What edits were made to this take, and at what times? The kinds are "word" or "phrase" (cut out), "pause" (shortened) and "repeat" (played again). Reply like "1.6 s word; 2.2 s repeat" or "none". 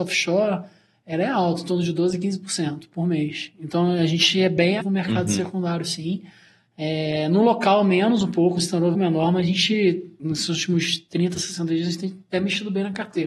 4.8 s word; 8.9 s phrase; 10.2 s word